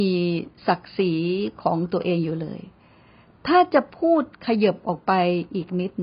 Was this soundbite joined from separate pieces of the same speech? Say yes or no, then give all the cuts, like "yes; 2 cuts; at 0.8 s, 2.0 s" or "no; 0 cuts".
no; 0 cuts